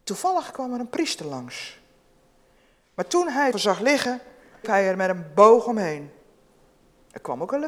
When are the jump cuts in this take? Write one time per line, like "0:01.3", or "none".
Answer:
0:03.5
0:04.6